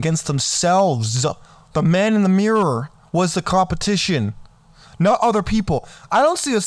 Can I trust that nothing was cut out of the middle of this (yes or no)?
yes